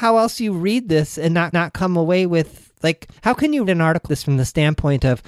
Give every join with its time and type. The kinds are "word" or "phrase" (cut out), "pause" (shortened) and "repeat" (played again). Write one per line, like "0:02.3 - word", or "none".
0:01.5 - repeat
0:03.2 - pause
0:03.7 - word
0:04.1 - word